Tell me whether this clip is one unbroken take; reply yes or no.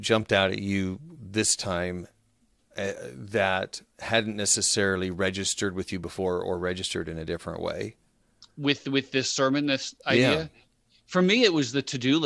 yes